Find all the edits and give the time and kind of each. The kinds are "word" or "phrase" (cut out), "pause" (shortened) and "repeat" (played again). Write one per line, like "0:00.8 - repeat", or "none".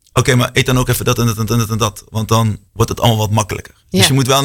0:01.5 - repeat
0:02.7 - pause